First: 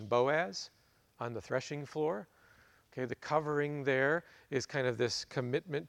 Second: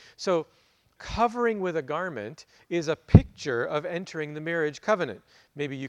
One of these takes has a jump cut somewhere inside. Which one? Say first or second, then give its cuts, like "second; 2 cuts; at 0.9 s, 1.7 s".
second; 1 cut; at 1.0 s